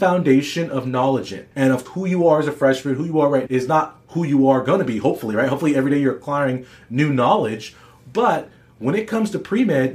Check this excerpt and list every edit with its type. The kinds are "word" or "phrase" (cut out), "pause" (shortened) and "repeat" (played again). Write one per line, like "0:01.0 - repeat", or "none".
0:01.5 - pause
0:01.9 - word
0:03.5 - word